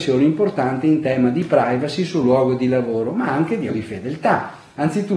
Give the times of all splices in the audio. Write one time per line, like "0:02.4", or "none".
0:03.7